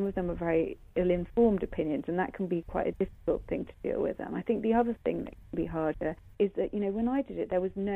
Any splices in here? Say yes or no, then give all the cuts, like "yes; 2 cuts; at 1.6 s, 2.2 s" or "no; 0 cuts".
no; 0 cuts